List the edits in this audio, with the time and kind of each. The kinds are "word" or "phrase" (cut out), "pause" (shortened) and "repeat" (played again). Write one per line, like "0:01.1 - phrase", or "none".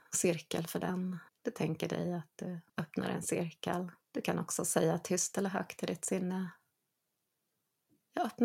0:01.3 - pause
0:02.7 - pause
0:04.0 - pause